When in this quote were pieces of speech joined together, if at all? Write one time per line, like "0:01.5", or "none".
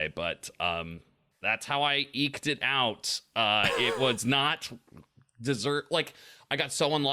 none